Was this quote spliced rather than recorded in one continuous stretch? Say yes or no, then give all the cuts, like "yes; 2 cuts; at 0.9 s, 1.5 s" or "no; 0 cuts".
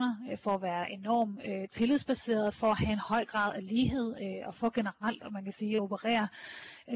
no; 0 cuts